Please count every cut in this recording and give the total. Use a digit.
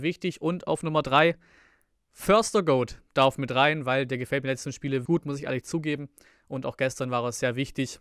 1